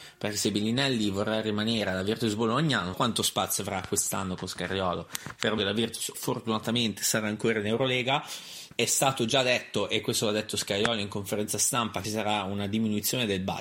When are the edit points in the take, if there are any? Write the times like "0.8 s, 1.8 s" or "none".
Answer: 2.9 s, 5.6 s, 6.1 s, 8.7 s, 12.0 s